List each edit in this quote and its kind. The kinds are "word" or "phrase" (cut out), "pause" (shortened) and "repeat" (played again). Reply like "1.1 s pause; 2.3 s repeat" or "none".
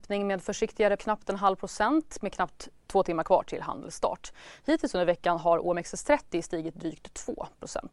1.0 s word

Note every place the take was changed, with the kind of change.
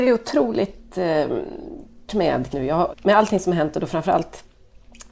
2.1 s word; 2.5 s phrase; 2.9 s word

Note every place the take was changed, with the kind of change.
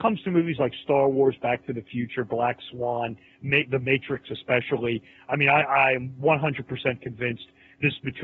none

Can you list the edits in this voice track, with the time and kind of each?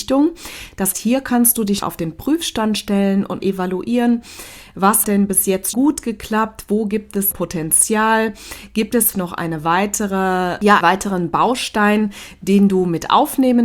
0.9 s word; 1.8 s word; 3.4 s word; 5.0 s word; 5.7 s word; 7.3 s word; 9.1 s word; 10.8 s word

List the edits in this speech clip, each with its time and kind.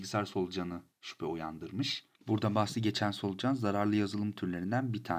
2.1 s pause

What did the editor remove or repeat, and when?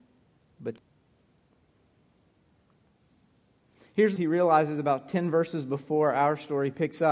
4.2 s phrase

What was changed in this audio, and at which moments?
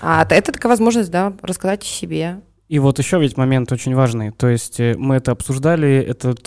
none

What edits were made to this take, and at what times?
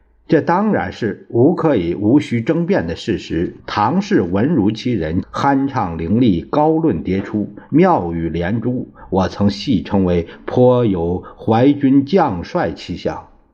3.6 s pause; 5.2 s phrase

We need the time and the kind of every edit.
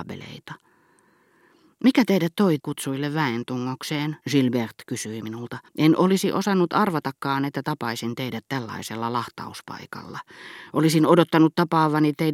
2.6 s word; 4.2 s pause; 5.7 s pause

